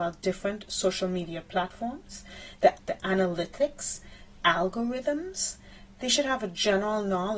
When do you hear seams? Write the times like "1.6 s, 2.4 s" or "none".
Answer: 2.8 s, 4.4 s